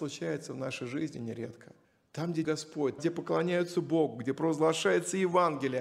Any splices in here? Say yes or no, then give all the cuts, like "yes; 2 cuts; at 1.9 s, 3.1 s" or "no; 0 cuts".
yes; 3 cuts; at 1.8 s, 2.4 s, 3.0 s